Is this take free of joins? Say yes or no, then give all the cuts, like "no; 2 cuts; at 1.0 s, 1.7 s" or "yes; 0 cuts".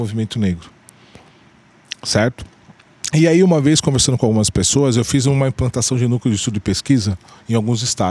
yes; 0 cuts